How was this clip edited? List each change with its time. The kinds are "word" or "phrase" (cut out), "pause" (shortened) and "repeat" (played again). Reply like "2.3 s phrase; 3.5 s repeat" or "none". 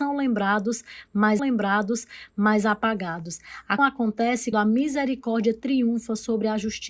1.4 s repeat; 3.8 s word; 4.5 s word